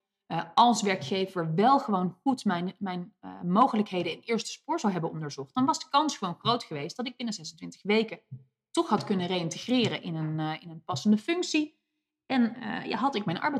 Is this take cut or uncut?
uncut